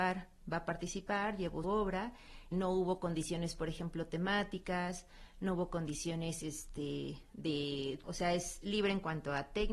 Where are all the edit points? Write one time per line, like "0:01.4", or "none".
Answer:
0:01.6
0:02.5
0:08.0